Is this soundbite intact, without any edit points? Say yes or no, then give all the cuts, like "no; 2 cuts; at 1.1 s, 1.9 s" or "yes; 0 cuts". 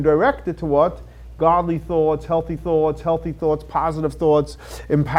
no; 1 cut; at 2.6 s